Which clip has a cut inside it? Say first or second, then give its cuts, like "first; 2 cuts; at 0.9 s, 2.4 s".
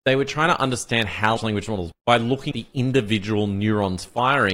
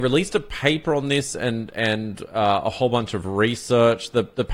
first; 3 cuts; at 1.4 s, 1.9 s, 2.5 s